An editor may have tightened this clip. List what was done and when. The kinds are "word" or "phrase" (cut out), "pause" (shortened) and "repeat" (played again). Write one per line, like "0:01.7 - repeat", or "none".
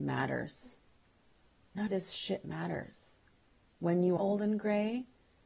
0:01.9 - word
0:04.2 - word